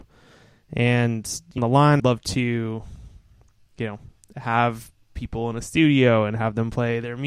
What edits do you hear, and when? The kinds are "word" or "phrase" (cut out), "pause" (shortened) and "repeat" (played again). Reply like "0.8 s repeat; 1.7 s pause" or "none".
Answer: 1.6 s phrase; 2.0 s word

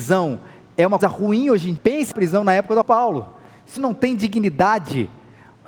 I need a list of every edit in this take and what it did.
1.0 s word; 1.8 s word; 2.1 s word; 2.8 s word; 3.8 s word

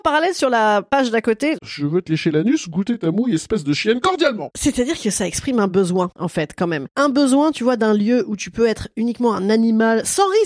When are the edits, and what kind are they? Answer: none

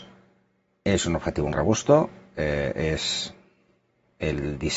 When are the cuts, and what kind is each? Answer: 1.5 s word

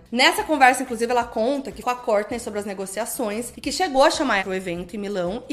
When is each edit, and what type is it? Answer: 1.8 s word; 4.4 s word

